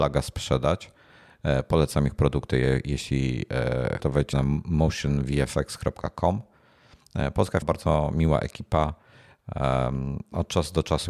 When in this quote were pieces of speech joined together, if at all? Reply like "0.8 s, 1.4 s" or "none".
4.0 s, 4.3 s, 7.6 s